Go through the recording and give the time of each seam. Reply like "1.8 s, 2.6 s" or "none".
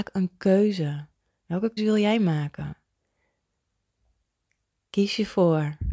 1.8 s